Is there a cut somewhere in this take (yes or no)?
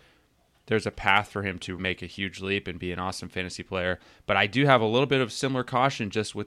yes